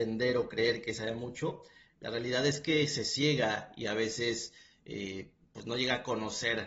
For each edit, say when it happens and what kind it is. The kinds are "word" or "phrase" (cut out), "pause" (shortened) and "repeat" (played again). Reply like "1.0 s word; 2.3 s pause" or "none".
none